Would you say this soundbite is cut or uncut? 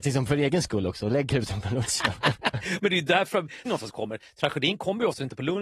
cut